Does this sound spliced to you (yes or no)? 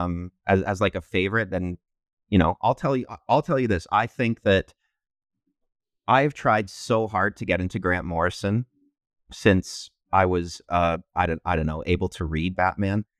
no